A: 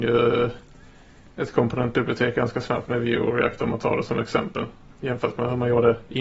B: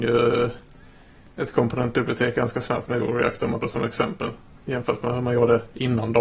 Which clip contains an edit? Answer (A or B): B